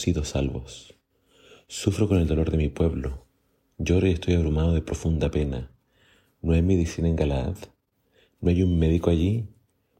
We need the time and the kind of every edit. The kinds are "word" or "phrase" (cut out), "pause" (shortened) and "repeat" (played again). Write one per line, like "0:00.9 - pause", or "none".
none